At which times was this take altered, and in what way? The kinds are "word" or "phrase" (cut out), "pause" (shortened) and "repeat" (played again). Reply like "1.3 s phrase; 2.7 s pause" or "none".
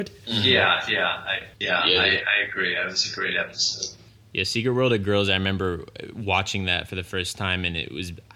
1.5 s pause